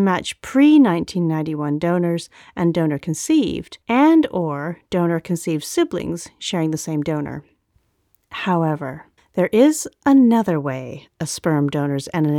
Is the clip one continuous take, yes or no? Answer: no